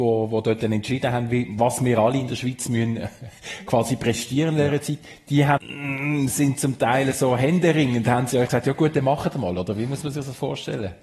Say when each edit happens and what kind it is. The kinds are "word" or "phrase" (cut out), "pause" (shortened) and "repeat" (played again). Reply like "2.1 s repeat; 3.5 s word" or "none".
5.6 s phrase; 8.5 s word